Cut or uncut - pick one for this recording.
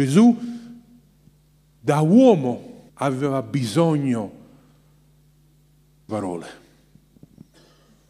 cut